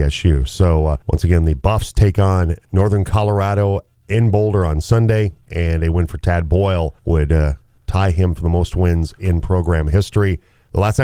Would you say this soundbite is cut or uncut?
cut